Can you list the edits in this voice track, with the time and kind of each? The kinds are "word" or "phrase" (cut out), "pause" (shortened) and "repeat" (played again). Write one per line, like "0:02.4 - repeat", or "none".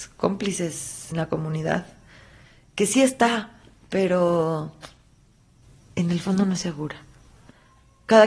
0:01.1 - word
0:06.6 - word